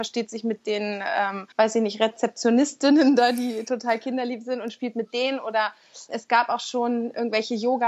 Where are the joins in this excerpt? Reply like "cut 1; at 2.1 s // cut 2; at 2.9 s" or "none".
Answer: cut 1; at 1.5 s // cut 2; at 6.1 s